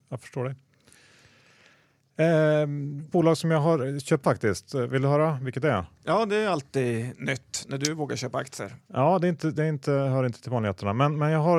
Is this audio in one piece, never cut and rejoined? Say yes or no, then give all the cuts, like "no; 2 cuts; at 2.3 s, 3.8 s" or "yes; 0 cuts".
no; 2 cuts; at 3.1 s, 4.2 s